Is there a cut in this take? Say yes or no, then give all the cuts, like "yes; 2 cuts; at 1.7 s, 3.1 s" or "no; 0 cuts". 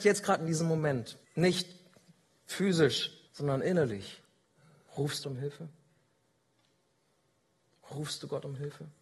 yes; 3 cuts; at 1.2 s, 3.3 s, 5.2 s